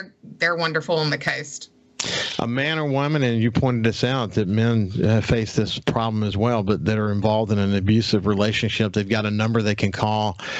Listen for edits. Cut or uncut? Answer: uncut